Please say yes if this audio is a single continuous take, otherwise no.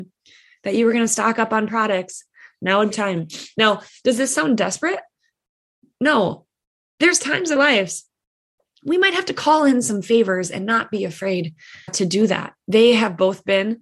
no